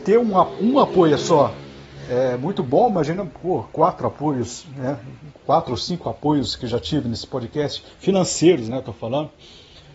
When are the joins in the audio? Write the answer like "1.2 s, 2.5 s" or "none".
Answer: none